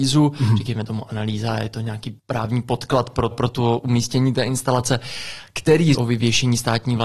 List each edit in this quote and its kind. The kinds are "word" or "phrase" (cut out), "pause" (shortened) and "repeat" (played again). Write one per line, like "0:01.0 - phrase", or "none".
0:02.2 - pause
0:03.3 - word
0:05.9 - phrase